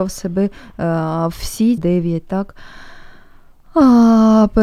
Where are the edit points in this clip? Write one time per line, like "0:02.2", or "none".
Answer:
0:01.3
0:01.8

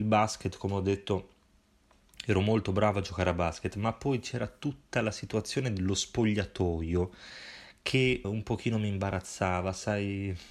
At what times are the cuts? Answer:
0:08.2

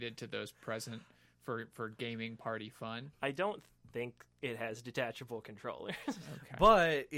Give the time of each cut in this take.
none

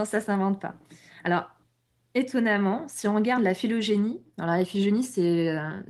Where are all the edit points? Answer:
none

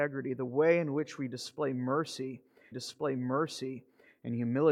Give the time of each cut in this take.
0:02.7

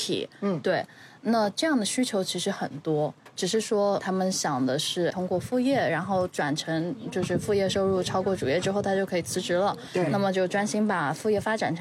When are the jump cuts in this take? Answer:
0:04.0
0:05.1

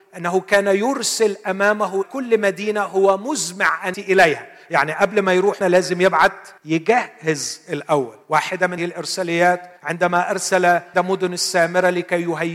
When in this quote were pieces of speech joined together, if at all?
0:02.0
0:03.9
0:05.6
0:06.6
0:08.2
0:08.8
0:09.8
0:10.9

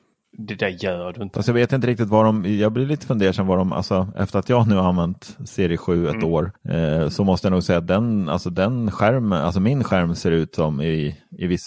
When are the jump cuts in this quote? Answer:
0:06.6

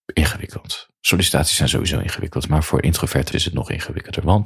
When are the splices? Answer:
0:03.3

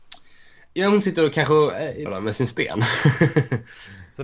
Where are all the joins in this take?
0:02.1

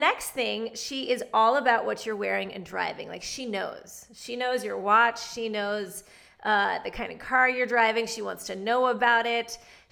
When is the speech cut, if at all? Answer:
none

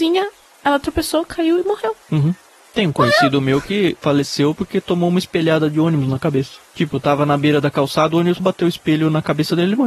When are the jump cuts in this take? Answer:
0:02.0
0:06.7
0:08.4

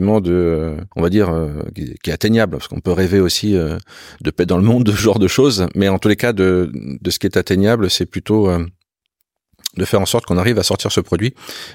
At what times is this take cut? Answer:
0:00.9

